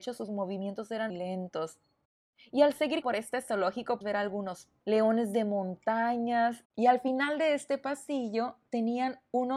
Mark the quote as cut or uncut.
cut